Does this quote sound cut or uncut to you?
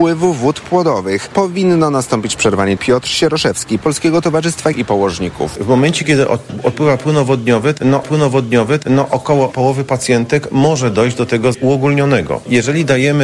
cut